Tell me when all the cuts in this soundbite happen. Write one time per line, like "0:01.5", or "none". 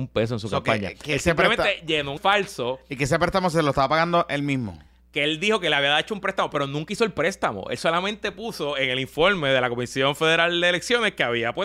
0:02.2